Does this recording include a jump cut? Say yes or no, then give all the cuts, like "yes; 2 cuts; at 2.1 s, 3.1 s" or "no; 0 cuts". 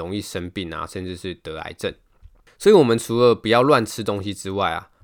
no; 0 cuts